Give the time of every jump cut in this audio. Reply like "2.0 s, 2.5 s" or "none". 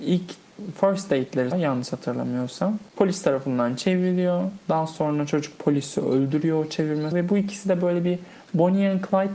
1.5 s, 7.1 s

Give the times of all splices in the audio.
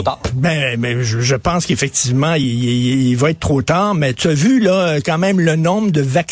none

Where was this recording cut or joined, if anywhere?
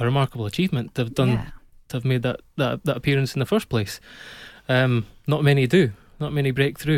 none

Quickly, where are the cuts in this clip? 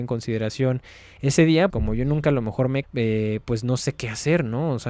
1.7 s, 2.8 s

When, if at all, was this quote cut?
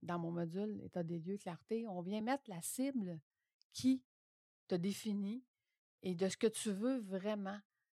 none

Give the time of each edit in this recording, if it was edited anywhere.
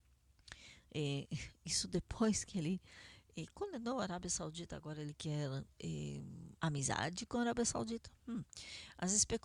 6.6 s

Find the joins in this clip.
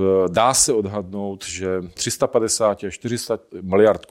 2.0 s

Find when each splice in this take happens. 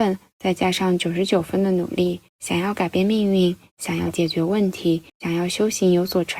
2.3 s, 5.1 s

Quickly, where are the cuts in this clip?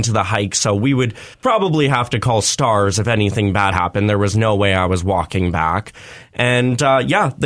1.3 s, 3.7 s

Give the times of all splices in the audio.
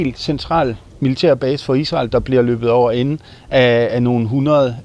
none

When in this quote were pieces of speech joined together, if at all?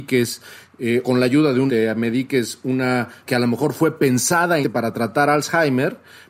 1.0 s, 1.7 s, 3.3 s, 4.6 s

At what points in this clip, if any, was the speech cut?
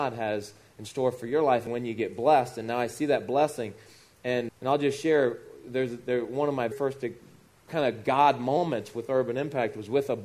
1.7 s, 4.5 s, 6.7 s

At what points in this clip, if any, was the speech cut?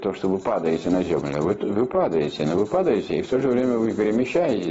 none

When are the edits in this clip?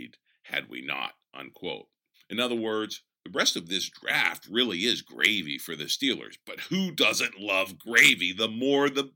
none

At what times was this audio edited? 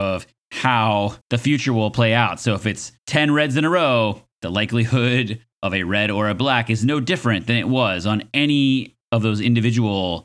1.2 s, 3.0 s, 4.3 s

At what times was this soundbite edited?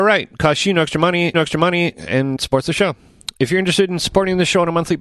1.3 s, 2.4 s

